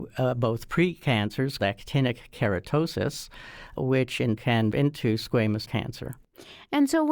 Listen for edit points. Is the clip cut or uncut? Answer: cut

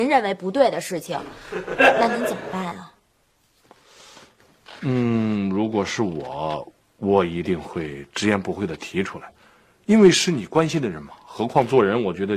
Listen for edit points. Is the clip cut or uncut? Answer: uncut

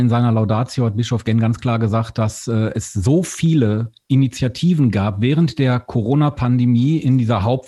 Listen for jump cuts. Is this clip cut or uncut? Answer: uncut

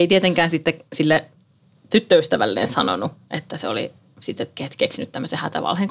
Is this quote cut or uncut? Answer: uncut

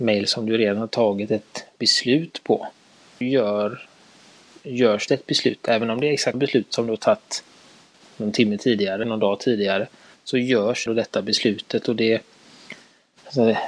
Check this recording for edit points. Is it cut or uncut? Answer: cut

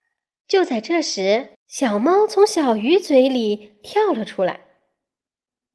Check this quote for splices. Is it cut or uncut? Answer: cut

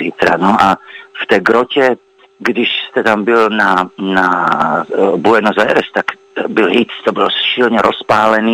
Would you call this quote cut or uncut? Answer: uncut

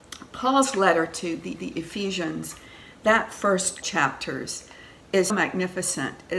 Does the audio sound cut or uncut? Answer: cut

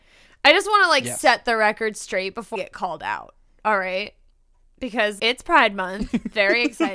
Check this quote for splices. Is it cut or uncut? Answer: cut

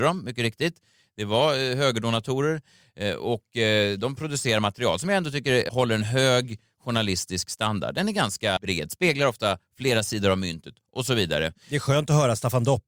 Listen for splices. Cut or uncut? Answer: uncut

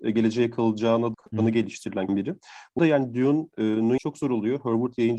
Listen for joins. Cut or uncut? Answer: cut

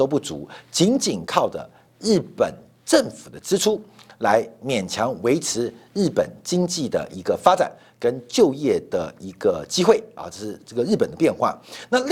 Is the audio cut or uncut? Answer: uncut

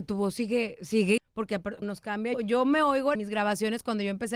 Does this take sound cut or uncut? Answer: cut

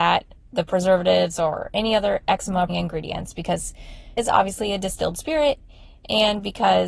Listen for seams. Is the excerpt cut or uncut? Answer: cut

